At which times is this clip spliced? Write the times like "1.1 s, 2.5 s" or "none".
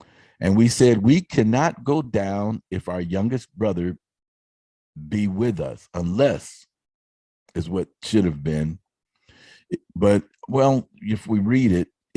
none